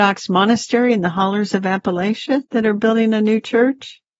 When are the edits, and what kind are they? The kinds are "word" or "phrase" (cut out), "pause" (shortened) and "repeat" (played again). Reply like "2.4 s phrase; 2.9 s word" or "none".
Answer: 2.4 s pause